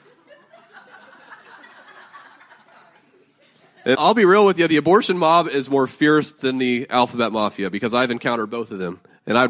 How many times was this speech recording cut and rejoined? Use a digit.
1